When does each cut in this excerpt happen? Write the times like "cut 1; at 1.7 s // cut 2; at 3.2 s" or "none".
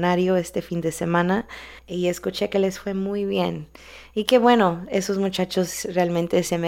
cut 1; at 1.8 s